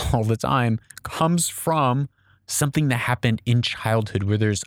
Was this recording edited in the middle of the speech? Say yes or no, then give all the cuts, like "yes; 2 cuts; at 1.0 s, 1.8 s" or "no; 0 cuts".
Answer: no; 0 cuts